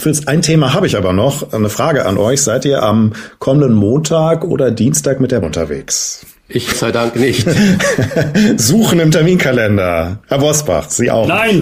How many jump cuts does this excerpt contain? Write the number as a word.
two